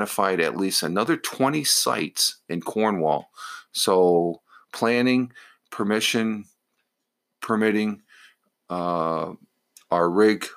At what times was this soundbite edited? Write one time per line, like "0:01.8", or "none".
none